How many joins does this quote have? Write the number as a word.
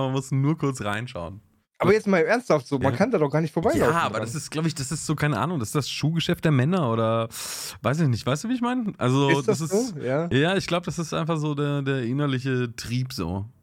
zero